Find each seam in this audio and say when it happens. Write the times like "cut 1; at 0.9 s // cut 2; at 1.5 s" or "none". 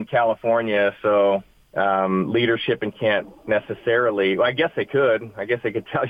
cut 1; at 1.5 s // cut 2; at 2.9 s